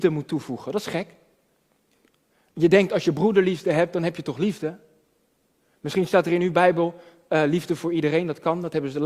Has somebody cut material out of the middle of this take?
no; 0 cuts

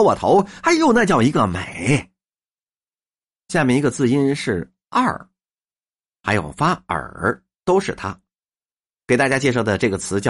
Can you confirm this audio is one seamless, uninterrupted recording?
yes; 0 cuts

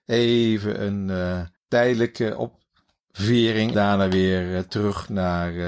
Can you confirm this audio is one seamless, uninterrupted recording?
no; 2 cuts; at 1.6 s, 3.7 s

